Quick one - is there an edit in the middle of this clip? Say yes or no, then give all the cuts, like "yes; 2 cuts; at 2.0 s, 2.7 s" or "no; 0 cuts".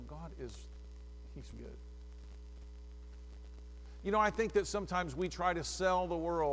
yes; 1 cut; at 1.5 s